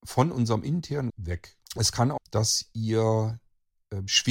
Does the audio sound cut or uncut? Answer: cut